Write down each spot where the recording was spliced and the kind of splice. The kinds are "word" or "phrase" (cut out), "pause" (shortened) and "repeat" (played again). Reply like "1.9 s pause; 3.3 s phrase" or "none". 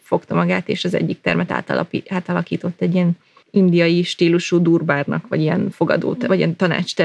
3.4 s pause